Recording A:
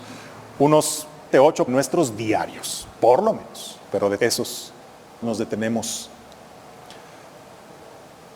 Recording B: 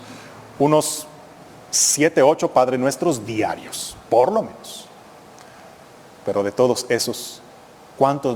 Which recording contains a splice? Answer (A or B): A